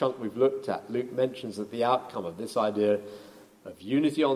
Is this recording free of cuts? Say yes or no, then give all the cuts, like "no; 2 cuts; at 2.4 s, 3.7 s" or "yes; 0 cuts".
yes; 0 cuts